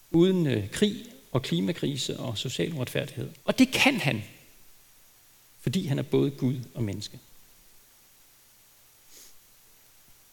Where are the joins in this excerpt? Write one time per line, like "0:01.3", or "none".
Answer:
0:03.4